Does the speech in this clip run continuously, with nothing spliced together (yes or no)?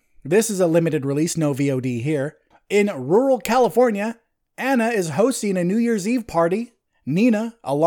yes